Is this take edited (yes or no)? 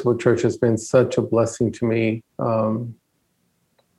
yes